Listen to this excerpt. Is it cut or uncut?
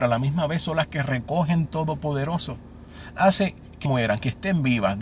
cut